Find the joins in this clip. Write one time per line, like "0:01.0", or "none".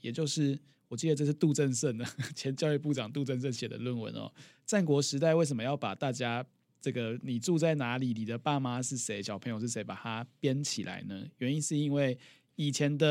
none